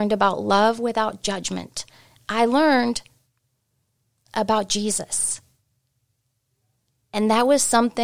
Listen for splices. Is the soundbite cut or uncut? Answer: uncut